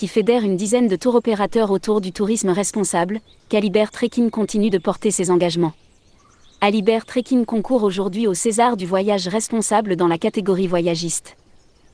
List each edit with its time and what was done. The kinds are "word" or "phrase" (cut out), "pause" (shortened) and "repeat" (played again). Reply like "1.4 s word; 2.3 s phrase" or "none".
none